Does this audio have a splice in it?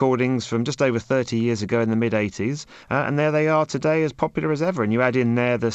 yes; 1 cut; at 2.8 s

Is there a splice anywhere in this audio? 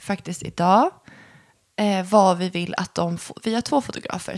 no; 0 cuts

